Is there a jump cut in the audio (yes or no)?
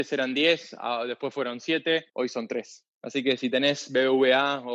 yes